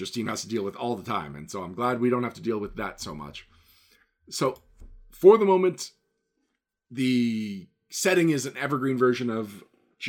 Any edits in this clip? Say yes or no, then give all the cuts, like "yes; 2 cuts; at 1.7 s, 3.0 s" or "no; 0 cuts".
no; 0 cuts